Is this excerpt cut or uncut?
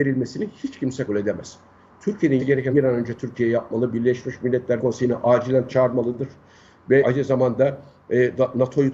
cut